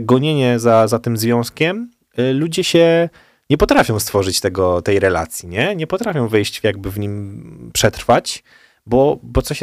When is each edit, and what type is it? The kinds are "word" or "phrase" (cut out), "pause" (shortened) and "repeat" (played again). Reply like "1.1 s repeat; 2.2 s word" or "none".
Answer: 6.6 s phrase